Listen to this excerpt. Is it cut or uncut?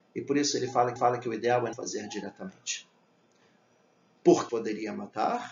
cut